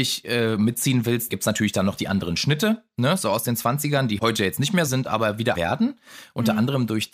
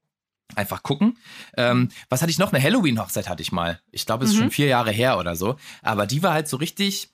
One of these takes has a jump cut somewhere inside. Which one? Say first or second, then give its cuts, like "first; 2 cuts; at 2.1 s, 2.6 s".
first; 4 cuts; at 1.3 s, 4.2 s, 4.9 s, 5.5 s